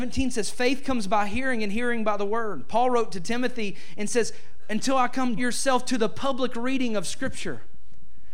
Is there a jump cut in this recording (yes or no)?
yes